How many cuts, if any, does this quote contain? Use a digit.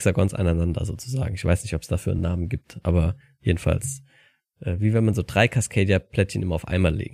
0